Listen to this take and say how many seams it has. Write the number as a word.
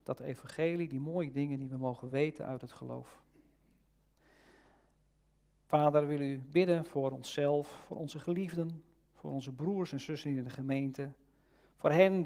zero